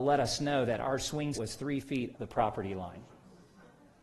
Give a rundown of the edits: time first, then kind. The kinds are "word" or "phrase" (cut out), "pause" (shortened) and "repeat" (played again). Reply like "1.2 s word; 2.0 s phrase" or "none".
1.3 s word; 2.1 s word